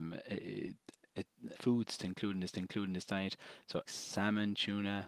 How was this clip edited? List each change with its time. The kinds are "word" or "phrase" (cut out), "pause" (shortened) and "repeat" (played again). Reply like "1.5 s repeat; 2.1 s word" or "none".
1.5 s word; 2.5 s repeat; 3.9 s word